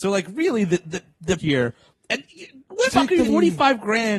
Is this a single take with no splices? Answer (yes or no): no